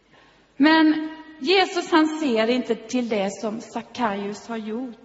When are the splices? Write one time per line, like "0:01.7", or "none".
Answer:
none